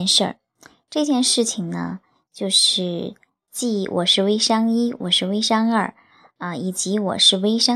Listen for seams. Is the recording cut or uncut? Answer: uncut